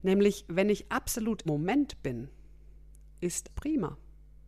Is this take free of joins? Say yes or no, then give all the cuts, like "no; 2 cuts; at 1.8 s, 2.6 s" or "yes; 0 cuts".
no; 2 cuts; at 1.5 s, 3.5 s